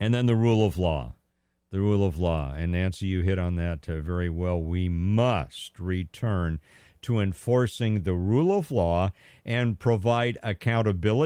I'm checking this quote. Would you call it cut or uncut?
uncut